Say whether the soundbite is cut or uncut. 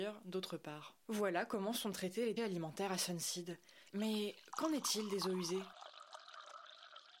cut